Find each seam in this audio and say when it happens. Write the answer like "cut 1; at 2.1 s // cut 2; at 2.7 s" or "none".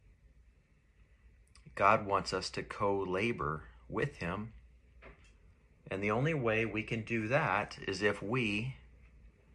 none